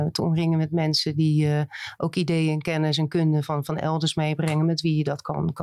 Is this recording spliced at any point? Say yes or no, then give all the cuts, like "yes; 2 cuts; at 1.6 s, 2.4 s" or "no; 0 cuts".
no; 0 cuts